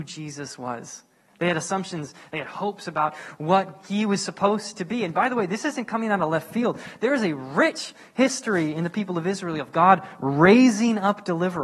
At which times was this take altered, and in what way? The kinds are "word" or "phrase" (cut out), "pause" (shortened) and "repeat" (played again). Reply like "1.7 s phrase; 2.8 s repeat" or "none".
none